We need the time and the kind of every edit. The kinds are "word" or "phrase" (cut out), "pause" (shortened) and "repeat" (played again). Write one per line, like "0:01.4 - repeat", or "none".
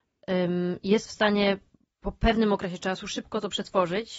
none